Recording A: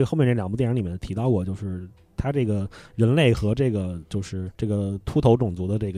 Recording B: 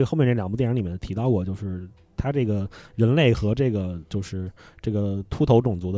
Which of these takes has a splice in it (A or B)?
A